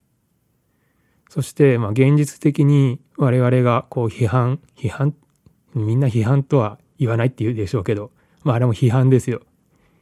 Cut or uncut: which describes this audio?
cut